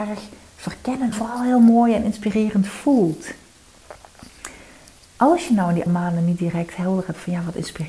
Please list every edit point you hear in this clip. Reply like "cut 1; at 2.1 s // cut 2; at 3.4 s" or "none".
cut 1; at 1.1 s // cut 2; at 5.9 s